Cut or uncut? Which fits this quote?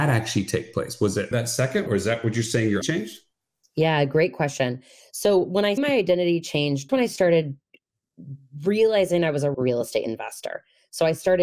cut